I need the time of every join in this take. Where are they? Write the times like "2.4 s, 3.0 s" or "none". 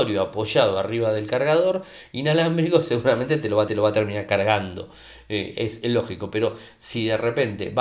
3.7 s